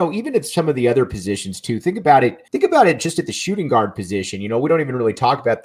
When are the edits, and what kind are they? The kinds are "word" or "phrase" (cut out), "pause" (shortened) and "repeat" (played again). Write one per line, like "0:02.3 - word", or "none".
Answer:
0:02.5 - pause